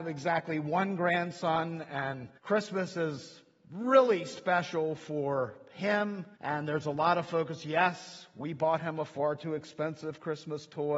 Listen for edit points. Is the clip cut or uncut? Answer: cut